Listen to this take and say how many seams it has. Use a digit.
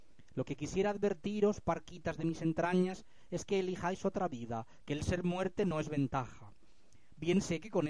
0